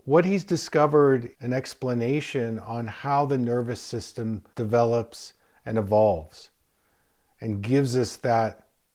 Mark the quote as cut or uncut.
cut